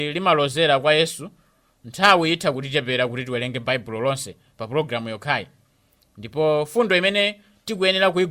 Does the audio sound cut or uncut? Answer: uncut